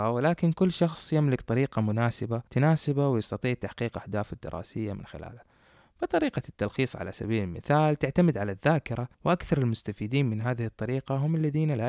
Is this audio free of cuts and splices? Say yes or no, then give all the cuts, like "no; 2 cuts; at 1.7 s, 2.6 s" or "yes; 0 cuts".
no; 2 cuts; at 2.5 s, 9.1 s